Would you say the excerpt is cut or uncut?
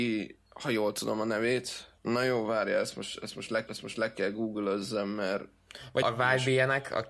cut